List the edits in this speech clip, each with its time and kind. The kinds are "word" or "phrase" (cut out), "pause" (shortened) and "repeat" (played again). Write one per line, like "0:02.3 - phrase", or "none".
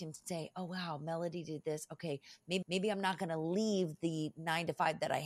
0:02.6 - repeat